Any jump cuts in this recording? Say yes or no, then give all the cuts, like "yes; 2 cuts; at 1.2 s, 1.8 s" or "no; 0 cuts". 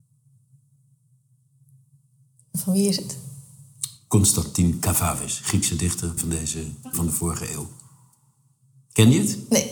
yes; 2 cuts; at 6.2 s, 6.9 s